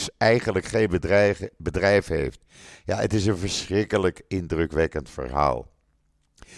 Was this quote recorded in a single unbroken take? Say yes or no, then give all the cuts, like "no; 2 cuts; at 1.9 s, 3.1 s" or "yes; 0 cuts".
yes; 0 cuts